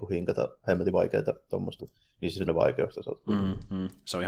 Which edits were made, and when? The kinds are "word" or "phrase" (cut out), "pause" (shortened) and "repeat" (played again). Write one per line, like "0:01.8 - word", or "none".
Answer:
0:01.8 - word
0:02.5 - word